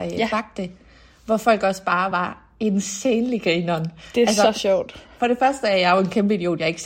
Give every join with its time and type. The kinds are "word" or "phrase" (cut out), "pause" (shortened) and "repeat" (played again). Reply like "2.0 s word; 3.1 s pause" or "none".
none